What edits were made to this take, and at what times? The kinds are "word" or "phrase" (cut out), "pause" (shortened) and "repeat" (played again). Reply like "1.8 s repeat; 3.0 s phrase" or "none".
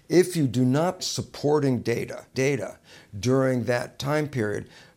1.0 s word; 2.3 s word